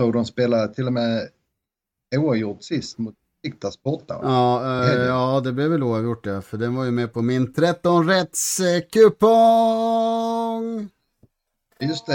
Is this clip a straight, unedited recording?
yes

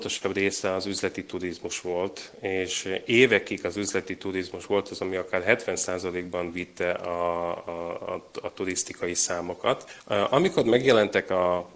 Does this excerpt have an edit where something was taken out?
no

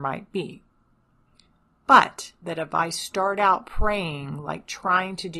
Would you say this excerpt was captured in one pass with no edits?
no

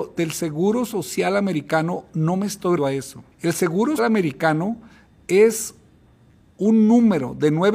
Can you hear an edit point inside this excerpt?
yes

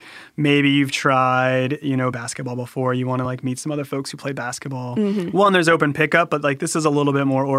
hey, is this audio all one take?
yes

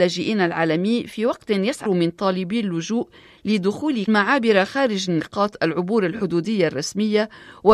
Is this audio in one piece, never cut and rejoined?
no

